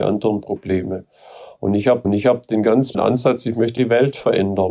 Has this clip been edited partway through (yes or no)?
yes